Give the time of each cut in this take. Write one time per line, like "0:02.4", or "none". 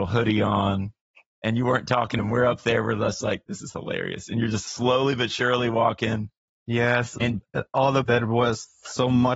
0:02.2
0:07.2
0:08.1